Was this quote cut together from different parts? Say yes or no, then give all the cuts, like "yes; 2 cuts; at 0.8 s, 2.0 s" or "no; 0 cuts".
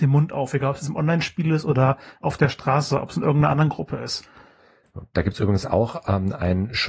no; 0 cuts